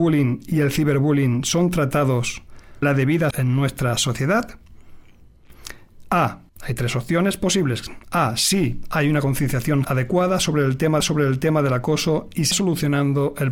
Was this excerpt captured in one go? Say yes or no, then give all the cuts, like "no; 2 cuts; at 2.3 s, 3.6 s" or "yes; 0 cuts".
no; 6 cuts; at 2.8 s, 3.3 s, 6.5 s, 9.8 s, 11.0 s, 12.5 s